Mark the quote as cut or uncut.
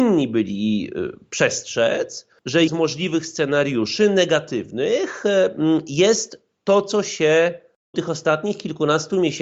cut